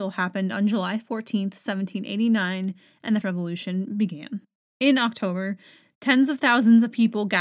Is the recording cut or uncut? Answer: cut